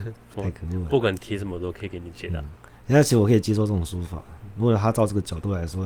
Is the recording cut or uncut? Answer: cut